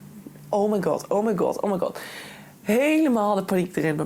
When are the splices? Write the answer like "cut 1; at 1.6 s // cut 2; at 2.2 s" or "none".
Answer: none